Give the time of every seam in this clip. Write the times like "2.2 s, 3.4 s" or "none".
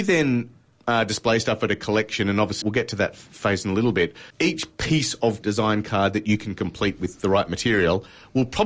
2.6 s, 4.3 s, 5.4 s